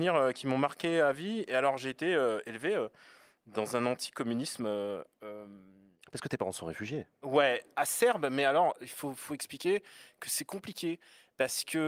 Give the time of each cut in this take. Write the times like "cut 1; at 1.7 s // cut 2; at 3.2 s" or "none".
none